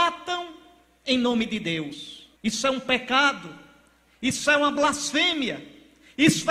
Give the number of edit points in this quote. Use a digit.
1